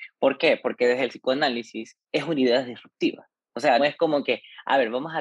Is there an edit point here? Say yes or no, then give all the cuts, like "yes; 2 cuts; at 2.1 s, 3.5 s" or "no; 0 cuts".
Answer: yes; 2 cuts; at 2.0 s, 3.8 s